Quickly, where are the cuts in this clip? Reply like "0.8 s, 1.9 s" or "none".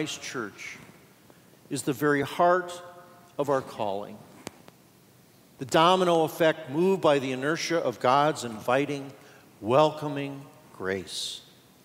none